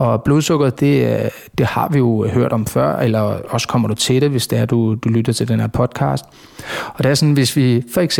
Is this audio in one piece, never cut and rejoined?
yes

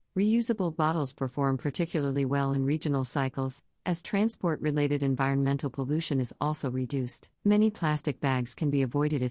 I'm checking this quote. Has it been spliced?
yes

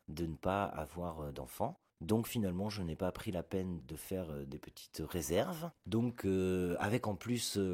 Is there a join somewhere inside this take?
yes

